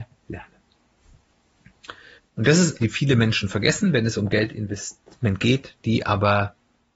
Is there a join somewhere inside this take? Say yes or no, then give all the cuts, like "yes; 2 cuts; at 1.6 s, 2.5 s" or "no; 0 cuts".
yes; 2 cuts; at 2.2 s, 2.8 s